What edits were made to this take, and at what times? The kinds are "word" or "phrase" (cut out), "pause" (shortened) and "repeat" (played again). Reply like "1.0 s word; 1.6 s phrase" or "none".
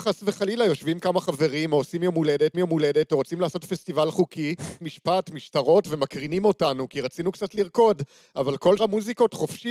2.5 s repeat; 4.8 s phrase; 8.8 s word

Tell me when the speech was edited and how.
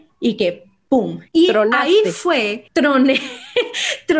1.3 s pause; 2.7 s pause

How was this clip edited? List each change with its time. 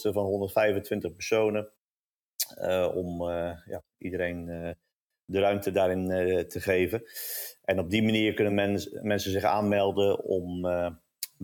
none

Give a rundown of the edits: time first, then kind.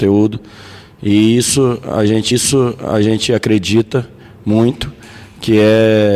2.3 s repeat

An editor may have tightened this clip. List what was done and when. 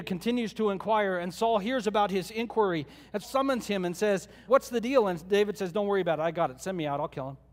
3.2 s phrase; 4.5 s word

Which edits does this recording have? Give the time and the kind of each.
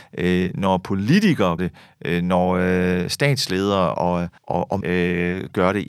1.6 s word; 3.9 s word; 4.4 s pause; 4.8 s word

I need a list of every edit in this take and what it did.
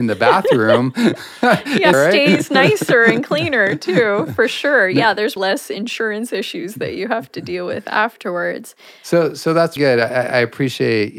1.9 s phrase; 5.4 s word; 9.8 s word

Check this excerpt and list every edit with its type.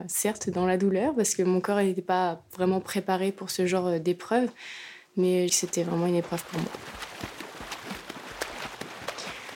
5.5 s phrase

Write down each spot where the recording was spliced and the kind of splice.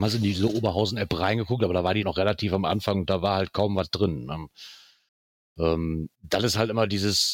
2.0 s word; 6.1 s pause

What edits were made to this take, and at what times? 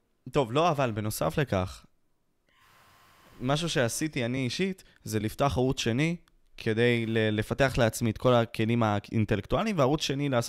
none

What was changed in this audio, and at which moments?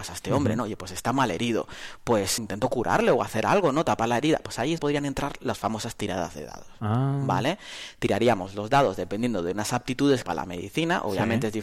2.4 s word; 4.8 s word; 10.2 s phrase

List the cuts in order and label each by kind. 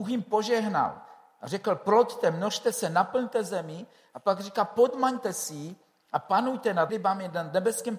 6.9 s word

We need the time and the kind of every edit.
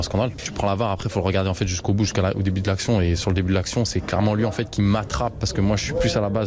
none

